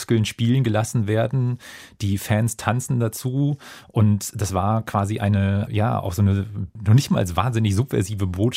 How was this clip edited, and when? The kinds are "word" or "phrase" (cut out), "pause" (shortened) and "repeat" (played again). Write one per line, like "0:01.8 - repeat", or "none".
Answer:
none